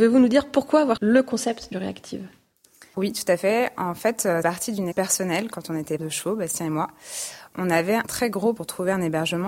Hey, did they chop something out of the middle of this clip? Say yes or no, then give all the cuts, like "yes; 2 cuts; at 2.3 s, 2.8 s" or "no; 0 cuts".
yes; 8 cuts; at 1.0 s, 1.7 s, 2.9 s, 4.4 s, 4.9 s, 6.0 s, 8.0 s, 8.6 s